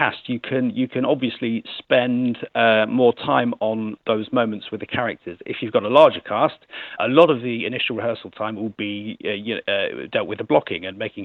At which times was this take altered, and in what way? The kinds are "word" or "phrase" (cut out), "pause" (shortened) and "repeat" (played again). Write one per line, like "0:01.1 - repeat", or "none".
0:03.6 - word
0:07.0 - word